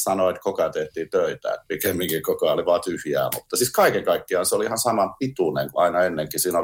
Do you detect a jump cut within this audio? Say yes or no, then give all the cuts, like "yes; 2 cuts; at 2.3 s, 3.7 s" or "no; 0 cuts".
yes; 1 cut; at 5.7 s